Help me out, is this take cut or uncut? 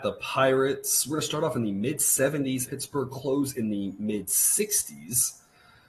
cut